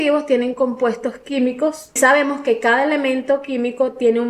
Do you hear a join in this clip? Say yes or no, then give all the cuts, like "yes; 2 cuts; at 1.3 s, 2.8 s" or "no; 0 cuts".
yes; 1 cut; at 2.0 s